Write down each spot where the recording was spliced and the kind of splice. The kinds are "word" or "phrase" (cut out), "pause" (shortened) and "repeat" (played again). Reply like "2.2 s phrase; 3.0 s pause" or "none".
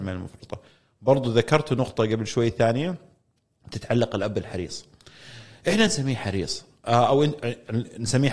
none